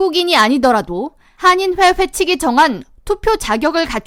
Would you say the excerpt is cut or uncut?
uncut